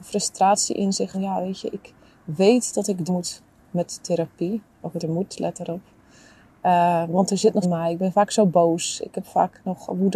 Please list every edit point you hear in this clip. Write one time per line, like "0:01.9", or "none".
0:01.1
0:03.1
0:05.0
0:07.6